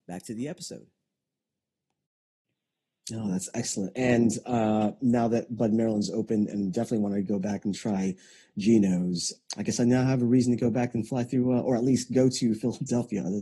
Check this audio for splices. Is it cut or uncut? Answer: uncut